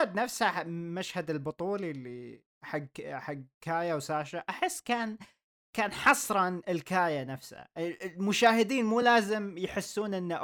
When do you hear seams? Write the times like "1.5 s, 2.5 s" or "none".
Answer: none